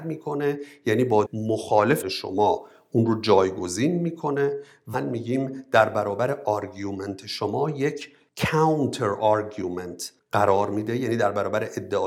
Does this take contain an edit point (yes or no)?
yes